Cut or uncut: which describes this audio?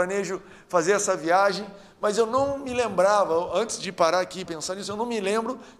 cut